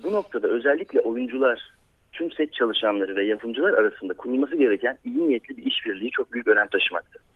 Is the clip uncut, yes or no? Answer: yes